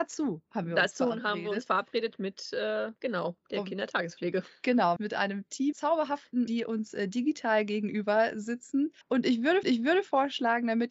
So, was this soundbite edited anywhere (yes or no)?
yes